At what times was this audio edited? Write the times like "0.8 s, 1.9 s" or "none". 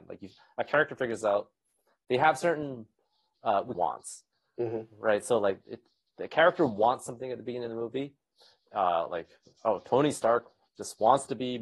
3.7 s